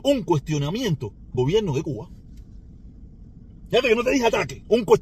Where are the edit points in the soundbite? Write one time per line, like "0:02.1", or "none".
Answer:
0:01.3